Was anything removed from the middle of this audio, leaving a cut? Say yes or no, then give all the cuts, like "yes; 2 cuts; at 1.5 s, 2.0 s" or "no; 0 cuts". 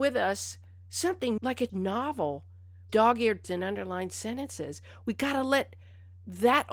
yes; 4 cuts; at 1.4 s, 1.7 s, 2.9 s, 3.4 s